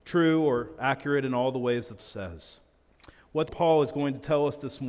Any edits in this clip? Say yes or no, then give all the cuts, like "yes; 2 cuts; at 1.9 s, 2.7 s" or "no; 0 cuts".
yes; 2 cuts; at 2.0 s, 3.5 s